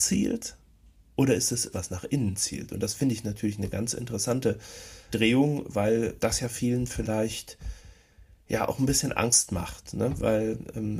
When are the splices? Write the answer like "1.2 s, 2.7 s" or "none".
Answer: 1.7 s, 5.1 s, 6.2 s